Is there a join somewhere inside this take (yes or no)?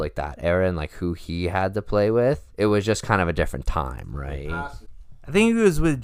yes